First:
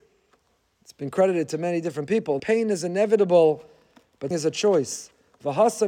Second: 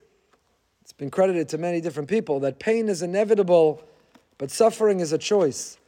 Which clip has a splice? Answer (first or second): first